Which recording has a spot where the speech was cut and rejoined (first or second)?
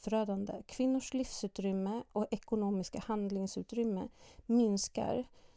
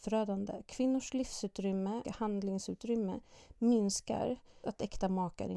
second